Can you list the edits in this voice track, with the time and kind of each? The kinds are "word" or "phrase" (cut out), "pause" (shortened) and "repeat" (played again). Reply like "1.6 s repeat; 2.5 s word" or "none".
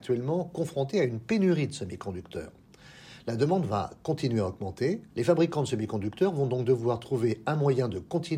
5.1 s pause